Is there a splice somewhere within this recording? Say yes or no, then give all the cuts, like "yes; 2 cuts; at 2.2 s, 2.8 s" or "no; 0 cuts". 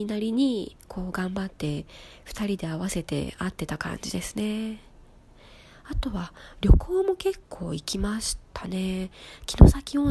no; 0 cuts